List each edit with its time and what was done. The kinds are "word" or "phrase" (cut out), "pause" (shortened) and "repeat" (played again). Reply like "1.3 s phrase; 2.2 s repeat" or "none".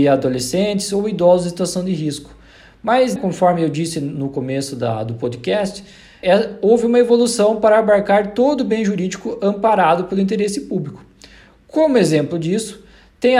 3.2 s word; 6.2 s word

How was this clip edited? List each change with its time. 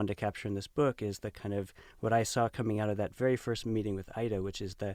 none

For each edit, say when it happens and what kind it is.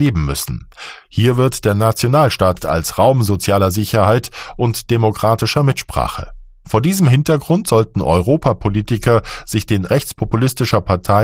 2.6 s word; 9.9 s word

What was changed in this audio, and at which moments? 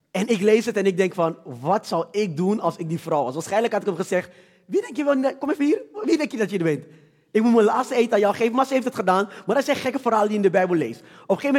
none

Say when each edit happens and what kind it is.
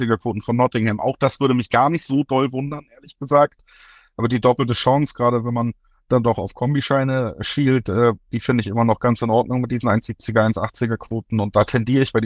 none

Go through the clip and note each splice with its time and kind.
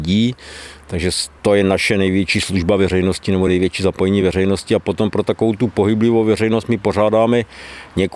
none

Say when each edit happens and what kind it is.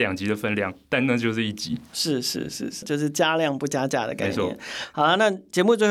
2.8 s phrase

